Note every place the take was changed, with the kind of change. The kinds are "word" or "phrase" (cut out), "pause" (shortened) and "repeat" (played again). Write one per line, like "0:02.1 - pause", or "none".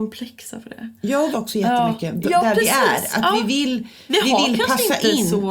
0:01.3 - phrase